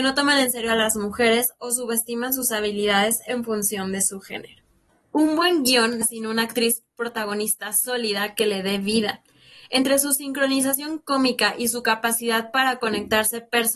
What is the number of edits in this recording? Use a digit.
1